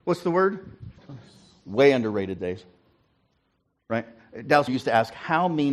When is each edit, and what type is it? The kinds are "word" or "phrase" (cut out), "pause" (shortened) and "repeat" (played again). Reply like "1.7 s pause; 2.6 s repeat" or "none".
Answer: 1.0 s pause; 2.4 s word; 4.7 s word